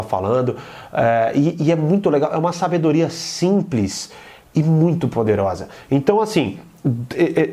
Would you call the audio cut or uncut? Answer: uncut